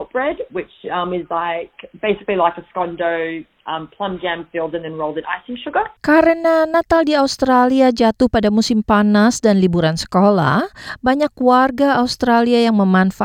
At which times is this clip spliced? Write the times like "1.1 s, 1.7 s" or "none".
6.0 s